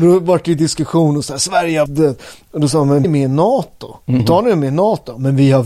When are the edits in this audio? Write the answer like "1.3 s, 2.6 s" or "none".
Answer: 1.9 s, 3.0 s, 4.2 s

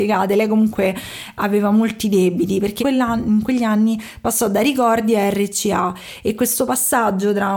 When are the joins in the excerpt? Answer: 2.8 s

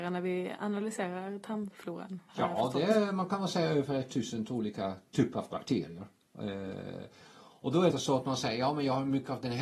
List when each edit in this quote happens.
2.3 s, 7.9 s

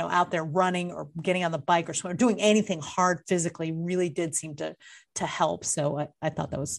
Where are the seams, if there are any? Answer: none

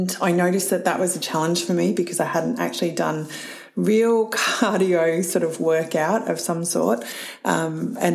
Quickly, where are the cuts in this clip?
none

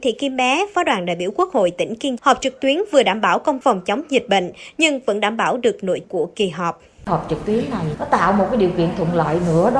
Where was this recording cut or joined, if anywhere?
2.2 s, 3.6 s, 6.0 s, 7.9 s

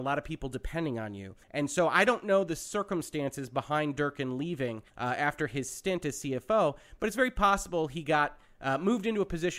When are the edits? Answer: 1.4 s, 4.9 s

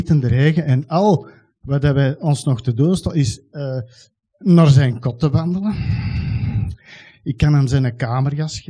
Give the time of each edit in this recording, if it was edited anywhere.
none

